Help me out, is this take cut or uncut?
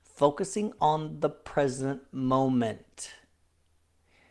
uncut